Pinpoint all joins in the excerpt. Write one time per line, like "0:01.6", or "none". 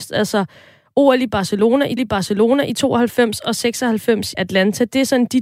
0:02.0
0:04.3